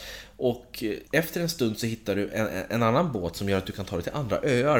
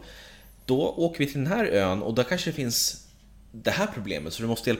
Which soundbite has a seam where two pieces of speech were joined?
first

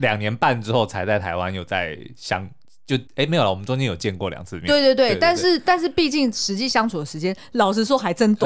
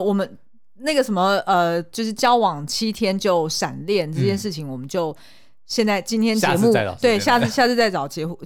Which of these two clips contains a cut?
first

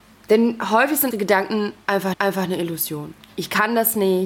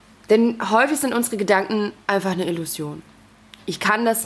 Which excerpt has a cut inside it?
first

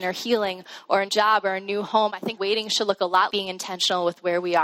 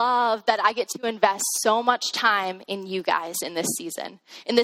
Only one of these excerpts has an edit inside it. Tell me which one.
first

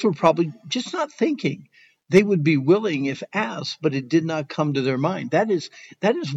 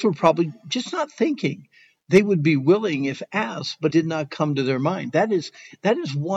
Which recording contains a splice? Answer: second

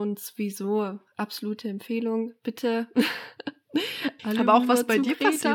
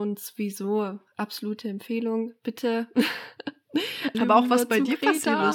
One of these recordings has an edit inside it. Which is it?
second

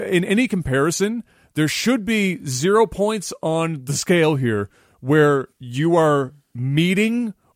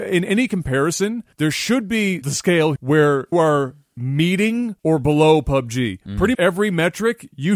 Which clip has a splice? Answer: second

